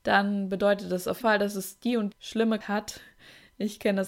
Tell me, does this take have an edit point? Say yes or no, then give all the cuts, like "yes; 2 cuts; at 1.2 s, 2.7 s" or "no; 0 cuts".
yes; 3 cuts; at 1.2 s, 2.1 s, 2.6 s